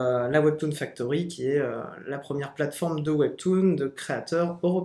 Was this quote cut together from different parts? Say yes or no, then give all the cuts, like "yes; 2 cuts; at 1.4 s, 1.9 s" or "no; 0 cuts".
no; 0 cuts